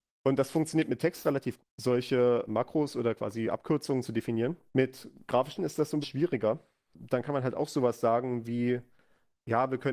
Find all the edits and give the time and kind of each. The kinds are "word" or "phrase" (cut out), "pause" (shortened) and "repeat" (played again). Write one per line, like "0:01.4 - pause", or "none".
0:01.6 - word
0:02.5 - word
0:04.7 - pause
0:05.6 - word
0:06.0 - word